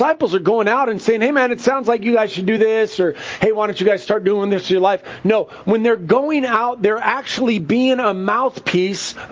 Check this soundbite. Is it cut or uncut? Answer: uncut